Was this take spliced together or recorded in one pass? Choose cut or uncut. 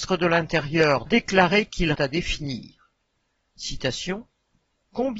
cut